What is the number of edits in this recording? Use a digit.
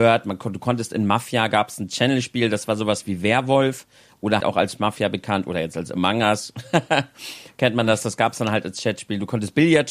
1